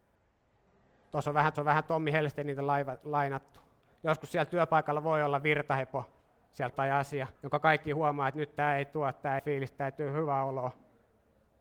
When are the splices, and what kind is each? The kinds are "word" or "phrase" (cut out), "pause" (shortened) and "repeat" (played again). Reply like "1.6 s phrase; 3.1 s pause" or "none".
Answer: 1.5 s repeat; 6.7 s phrase; 7.3 s pause; 9.4 s phrase